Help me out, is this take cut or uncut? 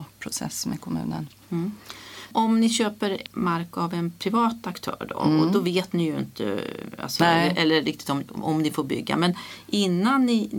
uncut